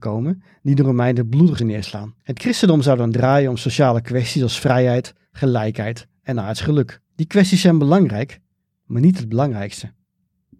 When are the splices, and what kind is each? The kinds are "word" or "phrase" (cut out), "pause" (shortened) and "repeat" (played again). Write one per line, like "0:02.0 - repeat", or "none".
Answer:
0:01.6 - word
0:02.2 - pause
0:07.1 - pause